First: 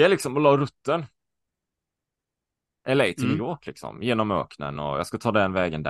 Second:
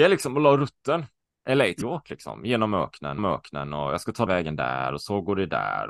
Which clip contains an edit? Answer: second; 4 cuts; at 1.2 s, 1.8 s, 3.2 s, 4.3 s

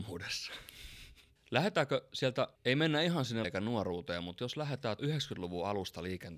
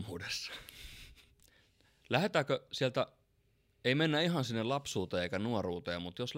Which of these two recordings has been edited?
first; 4 cuts; at 1.4 s, 2.6 s, 3.4 s, 5.0 s

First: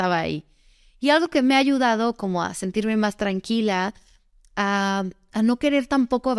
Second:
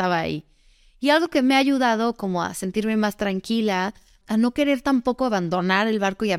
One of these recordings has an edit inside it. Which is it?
second; 1 cut; at 4.2 s

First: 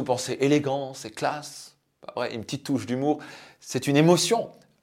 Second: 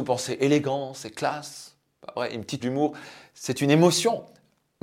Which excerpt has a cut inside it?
second; 1 cut; at 2.6 s

